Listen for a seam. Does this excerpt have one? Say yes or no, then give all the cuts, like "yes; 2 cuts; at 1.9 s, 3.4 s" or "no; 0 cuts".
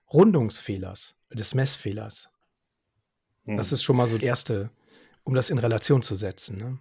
yes; 1 cut; at 4.2 s